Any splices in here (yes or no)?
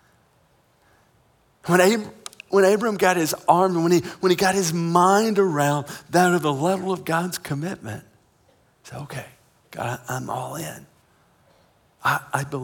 no